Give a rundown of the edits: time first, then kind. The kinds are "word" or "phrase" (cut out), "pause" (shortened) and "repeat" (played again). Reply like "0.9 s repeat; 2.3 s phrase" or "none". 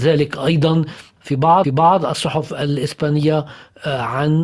1.2 s word; 1.6 s repeat